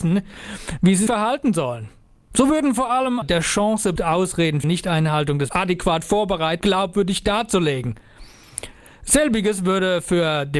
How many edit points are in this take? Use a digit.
6